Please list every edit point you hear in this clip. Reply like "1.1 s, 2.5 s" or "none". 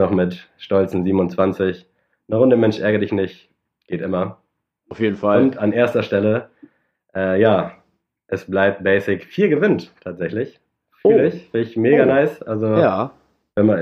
none